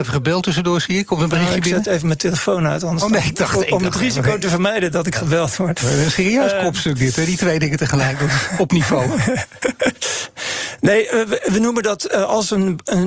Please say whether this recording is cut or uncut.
uncut